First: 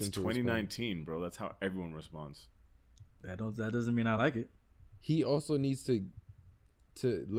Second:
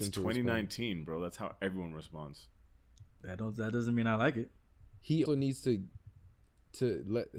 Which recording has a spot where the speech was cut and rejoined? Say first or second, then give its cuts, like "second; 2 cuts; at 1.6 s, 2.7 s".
second; 1 cut; at 5.3 s